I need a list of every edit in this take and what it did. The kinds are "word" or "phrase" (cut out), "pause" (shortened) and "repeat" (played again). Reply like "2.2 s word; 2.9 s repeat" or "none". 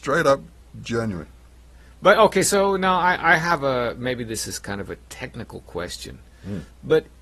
none